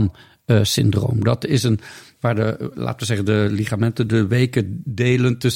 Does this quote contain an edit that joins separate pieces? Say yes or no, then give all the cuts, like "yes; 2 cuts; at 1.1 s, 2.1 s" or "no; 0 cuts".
no; 0 cuts